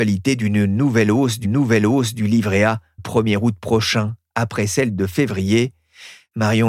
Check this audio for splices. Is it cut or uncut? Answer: cut